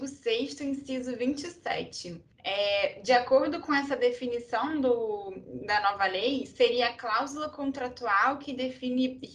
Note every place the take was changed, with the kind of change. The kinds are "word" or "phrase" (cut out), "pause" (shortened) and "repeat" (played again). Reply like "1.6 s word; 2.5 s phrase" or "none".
2.3 s pause